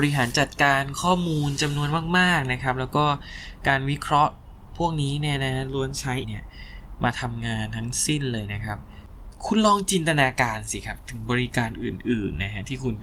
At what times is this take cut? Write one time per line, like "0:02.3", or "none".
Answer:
0:06.2

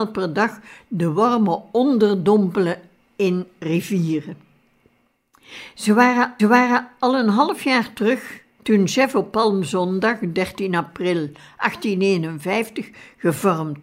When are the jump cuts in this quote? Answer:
0:06.4

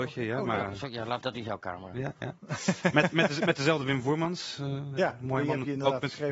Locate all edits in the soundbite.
0:01.2
0:02.4

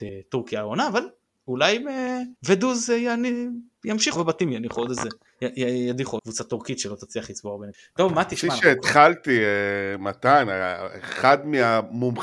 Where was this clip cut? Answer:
0:02.4
0:04.2
0:06.2

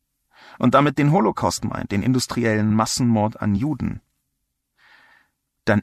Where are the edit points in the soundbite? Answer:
none

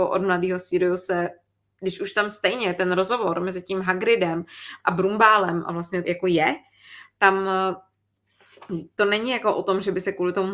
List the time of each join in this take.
0:06.0

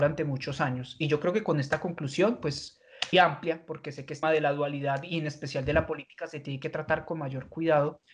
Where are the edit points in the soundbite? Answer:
0:03.1
0:04.2

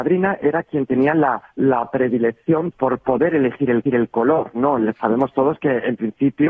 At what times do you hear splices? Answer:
0:01.5
0:02.7
0:03.9

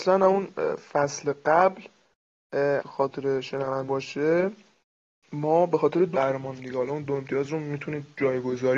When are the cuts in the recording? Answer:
0:02.8
0:03.9
0:06.1
0:06.6

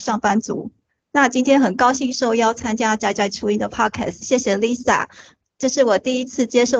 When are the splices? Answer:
none

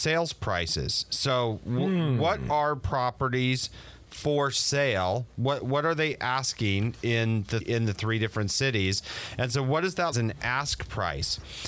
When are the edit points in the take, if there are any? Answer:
0:05.6
0:07.6
0:10.1

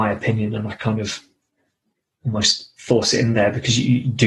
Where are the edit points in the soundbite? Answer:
none

